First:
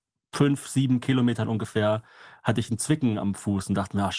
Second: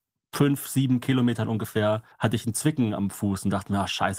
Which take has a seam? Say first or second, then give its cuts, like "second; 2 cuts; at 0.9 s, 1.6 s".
second; 1 cut; at 2.1 s